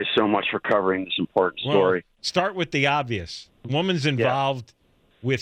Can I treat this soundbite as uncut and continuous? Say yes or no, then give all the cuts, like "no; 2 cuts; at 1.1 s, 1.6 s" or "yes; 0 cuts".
yes; 0 cuts